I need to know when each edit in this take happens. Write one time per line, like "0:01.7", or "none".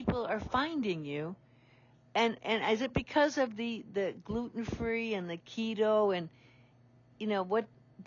none